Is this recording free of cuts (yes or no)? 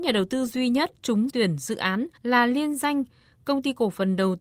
no